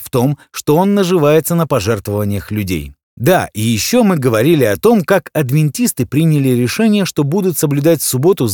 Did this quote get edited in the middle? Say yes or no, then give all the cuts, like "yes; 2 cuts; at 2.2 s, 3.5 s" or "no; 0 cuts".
yes; 1 cut; at 3.0 s